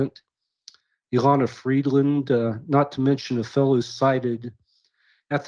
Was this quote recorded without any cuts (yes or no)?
yes